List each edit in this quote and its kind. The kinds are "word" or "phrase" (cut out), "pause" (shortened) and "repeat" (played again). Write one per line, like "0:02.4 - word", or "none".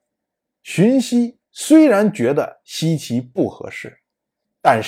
0:01.5 - pause